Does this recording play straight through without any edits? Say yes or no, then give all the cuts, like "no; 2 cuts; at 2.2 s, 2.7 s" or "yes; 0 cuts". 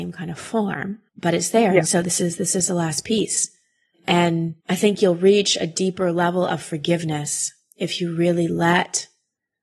no; 2 cuts; at 1.1 s, 4.6 s